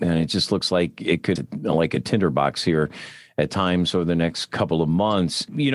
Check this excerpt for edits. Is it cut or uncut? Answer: cut